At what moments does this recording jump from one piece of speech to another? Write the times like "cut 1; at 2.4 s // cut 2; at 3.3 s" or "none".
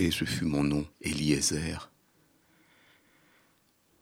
cut 1; at 0.9 s